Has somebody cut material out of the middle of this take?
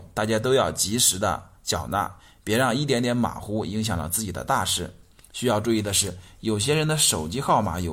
no; 0 cuts

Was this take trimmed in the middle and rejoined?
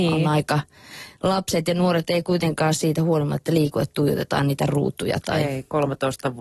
no; 0 cuts

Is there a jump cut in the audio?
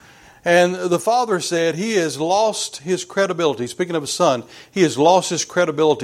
no; 0 cuts

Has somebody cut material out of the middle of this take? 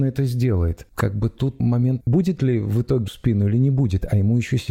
yes; 3 cuts; at 0.9 s, 2.0 s, 3.1 s

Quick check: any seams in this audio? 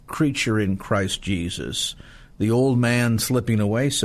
no; 0 cuts

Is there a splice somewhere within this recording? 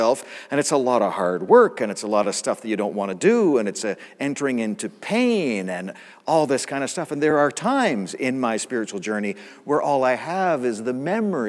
no; 0 cuts

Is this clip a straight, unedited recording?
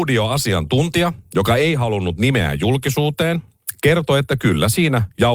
yes; 0 cuts

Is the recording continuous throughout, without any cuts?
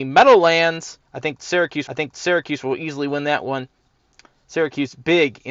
no; 2 cuts; at 1.0 s, 1.9 s

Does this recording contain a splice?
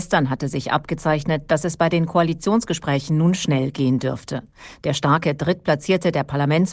no; 0 cuts

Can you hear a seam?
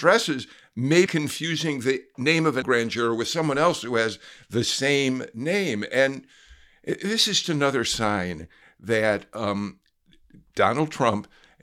yes; 3 cuts; at 1.1 s, 2.6 s, 7.4 s

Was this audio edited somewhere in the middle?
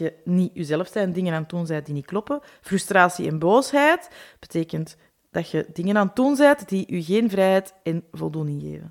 no; 0 cuts

